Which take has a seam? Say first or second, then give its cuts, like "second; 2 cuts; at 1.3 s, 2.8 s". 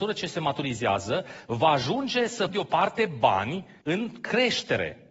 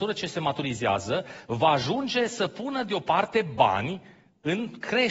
first; 2 cuts; at 2.5 s, 3.8 s